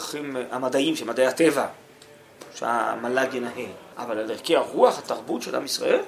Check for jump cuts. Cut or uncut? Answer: cut